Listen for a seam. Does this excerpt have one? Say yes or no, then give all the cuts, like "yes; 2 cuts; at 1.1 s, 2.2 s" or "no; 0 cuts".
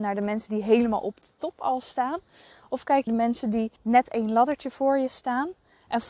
yes; 2 cuts; at 3.1 s, 3.8 s